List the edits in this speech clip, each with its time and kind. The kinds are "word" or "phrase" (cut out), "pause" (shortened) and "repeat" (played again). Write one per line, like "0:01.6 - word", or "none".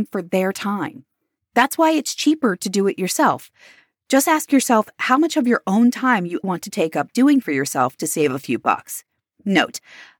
0:06.4 - word
0:07.4 - word